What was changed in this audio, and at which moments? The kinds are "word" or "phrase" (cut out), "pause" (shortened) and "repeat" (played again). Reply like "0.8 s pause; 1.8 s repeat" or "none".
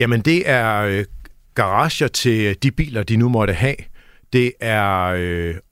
none